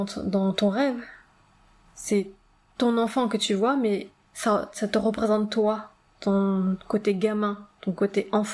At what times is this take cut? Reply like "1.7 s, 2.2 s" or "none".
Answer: none